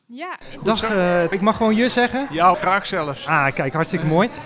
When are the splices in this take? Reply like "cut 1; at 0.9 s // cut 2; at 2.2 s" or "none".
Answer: cut 1; at 1.3 s // cut 2; at 2.5 s